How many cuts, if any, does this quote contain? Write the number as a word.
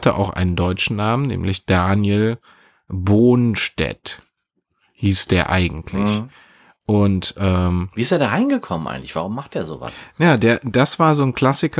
zero